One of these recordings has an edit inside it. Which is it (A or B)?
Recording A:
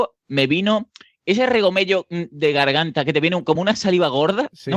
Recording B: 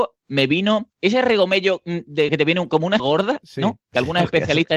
B